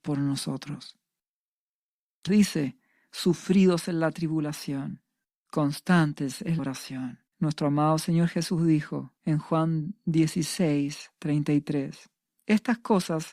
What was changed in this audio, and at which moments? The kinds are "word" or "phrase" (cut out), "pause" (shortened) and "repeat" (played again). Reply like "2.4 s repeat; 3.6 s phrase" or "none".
2.3 s word; 6.6 s word; 7.3 s pause; 9.2 s pause